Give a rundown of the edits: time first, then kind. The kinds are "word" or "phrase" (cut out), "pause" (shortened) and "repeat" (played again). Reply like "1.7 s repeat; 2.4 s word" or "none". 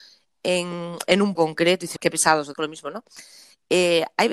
1.4 s word; 2.0 s word; 2.5 s word